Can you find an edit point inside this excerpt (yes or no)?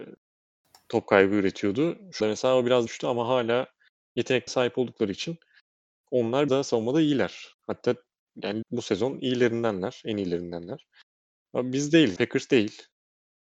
yes